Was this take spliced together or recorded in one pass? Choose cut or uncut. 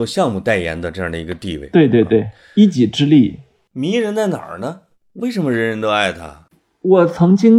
uncut